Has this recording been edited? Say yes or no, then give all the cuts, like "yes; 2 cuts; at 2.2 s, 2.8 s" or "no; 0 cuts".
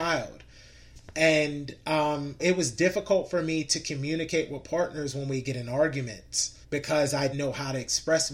yes; 3 cuts; at 2.4 s, 6.6 s, 7.3 s